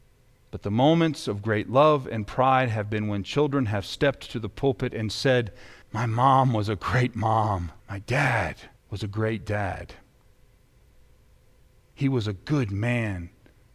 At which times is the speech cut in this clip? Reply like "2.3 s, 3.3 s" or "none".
5.8 s, 7.8 s, 8.8 s